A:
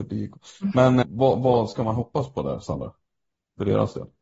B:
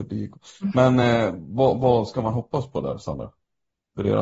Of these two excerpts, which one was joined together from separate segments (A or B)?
A